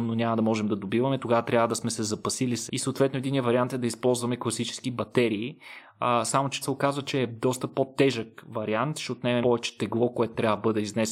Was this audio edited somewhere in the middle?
yes; 3 cuts; at 2.7 s, 6.6 s, 9.4 s

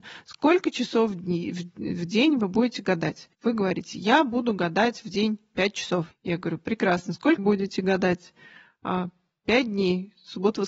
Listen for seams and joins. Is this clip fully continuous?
no; 3 cuts; at 3.3 s, 6.1 s, 7.4 s

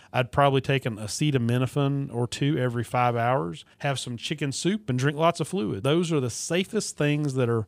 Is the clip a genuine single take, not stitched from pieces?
no; 2 cuts; at 3.7 s, 5.8 s

